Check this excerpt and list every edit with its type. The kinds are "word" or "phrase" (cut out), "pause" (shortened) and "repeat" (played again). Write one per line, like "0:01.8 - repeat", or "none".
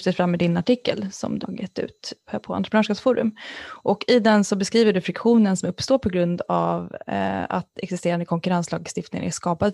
0:01.4 - word